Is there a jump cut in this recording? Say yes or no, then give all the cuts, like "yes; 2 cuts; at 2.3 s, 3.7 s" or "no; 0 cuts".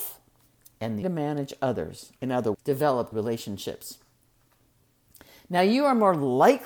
yes; 4 cuts; at 1.0 s, 2.2 s, 2.5 s, 3.1 s